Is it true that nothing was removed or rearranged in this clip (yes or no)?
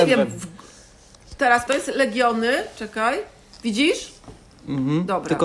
no